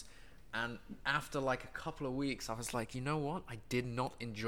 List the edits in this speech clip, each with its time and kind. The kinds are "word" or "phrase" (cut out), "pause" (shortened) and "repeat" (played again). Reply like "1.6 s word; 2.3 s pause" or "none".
none